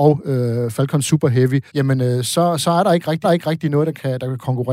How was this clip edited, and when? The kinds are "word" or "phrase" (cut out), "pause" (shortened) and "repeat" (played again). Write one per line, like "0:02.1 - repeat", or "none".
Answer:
0:01.7 - pause
0:03.2 - repeat

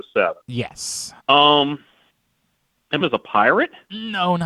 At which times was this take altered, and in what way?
0:01.2 - pause
0:03.0 - phrase

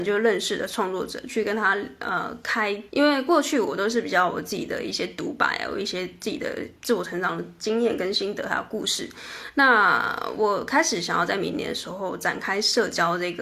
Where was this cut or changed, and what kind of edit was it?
0:02.9 - word

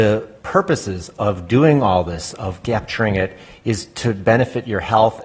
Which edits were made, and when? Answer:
none

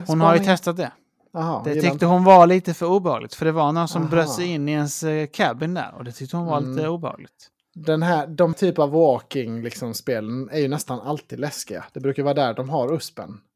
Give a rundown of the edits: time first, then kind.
0:08.5 - word

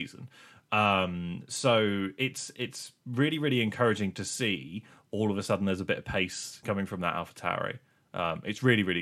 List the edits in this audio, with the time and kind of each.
0:06.6 - word

